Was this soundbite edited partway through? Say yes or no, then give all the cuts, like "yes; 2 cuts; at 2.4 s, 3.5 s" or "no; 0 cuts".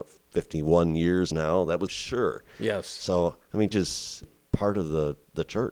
yes; 4 cuts; at 1.3 s, 1.9 s, 3.7 s, 4.2 s